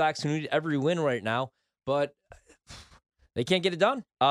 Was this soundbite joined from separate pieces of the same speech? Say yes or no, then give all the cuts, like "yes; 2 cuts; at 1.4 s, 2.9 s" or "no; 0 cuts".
no; 0 cuts